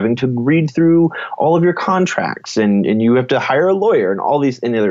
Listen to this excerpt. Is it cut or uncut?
uncut